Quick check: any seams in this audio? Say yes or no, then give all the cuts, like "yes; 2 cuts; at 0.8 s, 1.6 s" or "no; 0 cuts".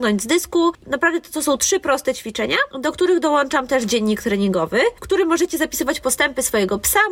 yes; 1 cut; at 2.7 s